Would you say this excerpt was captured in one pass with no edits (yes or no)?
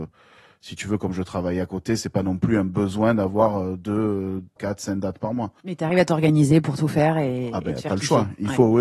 no